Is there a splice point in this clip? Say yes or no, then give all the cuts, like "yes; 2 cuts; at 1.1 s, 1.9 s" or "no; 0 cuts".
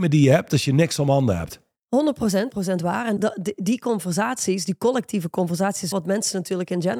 yes; 3 cuts; at 2.5 s, 3.2 s, 5.9 s